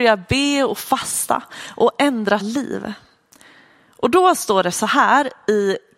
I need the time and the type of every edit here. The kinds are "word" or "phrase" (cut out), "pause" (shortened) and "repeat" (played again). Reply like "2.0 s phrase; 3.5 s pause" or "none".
2.4 s word